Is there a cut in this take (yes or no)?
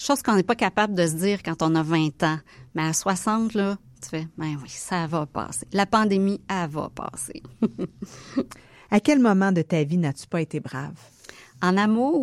no